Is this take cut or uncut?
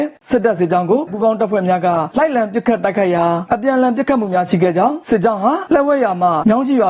cut